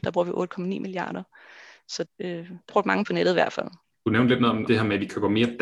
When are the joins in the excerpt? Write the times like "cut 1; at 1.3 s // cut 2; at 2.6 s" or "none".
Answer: cut 1; at 2.0 s // cut 2; at 2.7 s // cut 3; at 3.0 s // cut 4; at 4.7 s